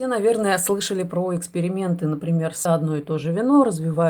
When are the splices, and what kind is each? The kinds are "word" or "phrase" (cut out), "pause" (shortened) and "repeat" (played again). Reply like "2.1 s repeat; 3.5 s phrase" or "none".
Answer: 2.7 s phrase